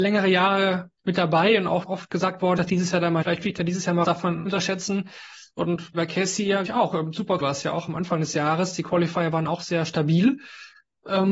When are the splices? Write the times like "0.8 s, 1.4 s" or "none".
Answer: 1.0 s, 1.8 s, 2.6 s, 3.2 s, 4.0 s, 4.5 s, 5.9 s, 6.7 s, 7.4 s